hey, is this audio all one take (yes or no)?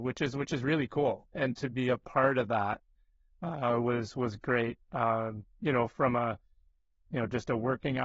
yes